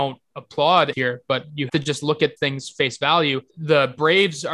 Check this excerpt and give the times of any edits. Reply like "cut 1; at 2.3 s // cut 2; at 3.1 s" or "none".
cut 1; at 0.9 s // cut 2; at 1.7 s // cut 3; at 2.4 s // cut 4; at 3.5 s